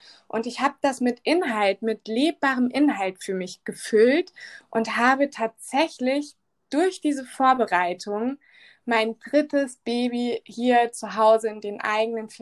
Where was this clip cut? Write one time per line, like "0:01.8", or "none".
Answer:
none

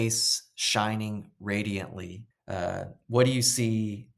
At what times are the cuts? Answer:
0:02.3

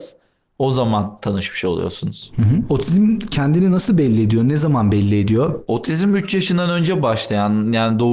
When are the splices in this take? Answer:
none

